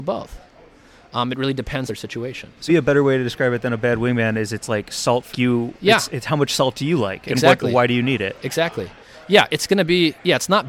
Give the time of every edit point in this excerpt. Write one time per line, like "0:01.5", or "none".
0:01.9
0:02.7
0:05.3